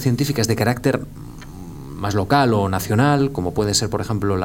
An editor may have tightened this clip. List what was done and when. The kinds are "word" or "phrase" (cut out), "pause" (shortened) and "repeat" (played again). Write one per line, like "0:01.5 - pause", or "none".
none